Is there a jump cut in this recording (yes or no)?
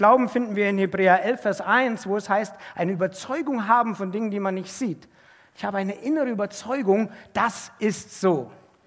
no